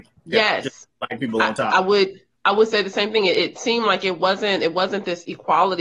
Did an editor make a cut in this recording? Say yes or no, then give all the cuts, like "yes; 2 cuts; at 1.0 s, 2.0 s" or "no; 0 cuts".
yes; 1 cut; at 2.3 s